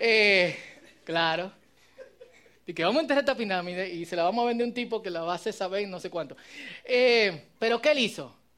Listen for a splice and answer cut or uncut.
cut